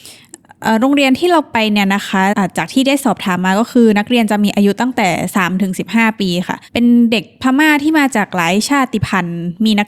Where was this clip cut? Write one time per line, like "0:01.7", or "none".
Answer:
0:06.7